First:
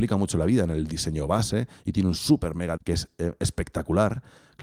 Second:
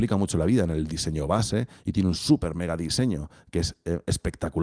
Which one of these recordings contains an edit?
first; 1 cut; at 2.8 s

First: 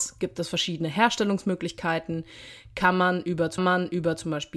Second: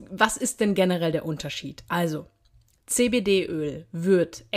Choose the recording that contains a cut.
first; 1 cut; at 3.6 s

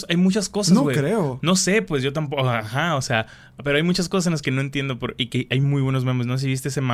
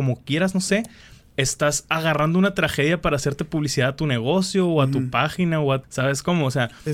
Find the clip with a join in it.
second; 1 cut; at 5.8 s

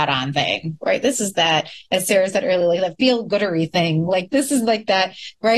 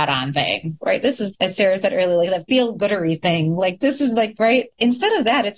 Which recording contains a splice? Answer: second; 2 cuts; at 1.3 s, 4.4 s

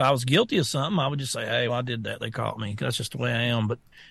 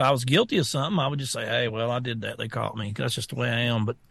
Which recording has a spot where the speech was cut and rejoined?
first; 1 cut; at 1.7 s

